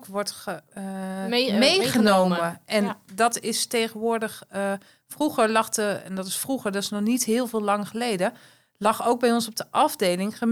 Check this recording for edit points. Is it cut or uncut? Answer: uncut